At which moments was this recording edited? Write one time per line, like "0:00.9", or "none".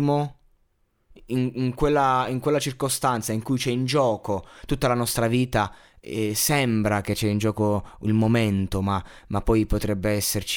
none